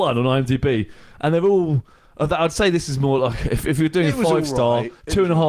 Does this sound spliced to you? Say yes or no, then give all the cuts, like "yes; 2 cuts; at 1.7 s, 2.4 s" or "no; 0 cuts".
no; 0 cuts